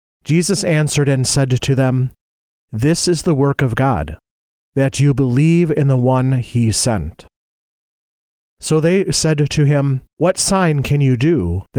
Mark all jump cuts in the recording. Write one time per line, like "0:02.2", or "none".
0:10.1